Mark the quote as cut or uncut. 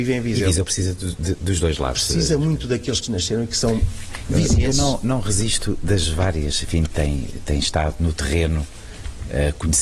uncut